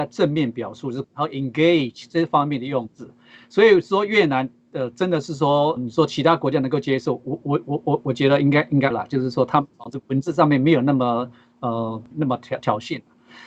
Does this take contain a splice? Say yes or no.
yes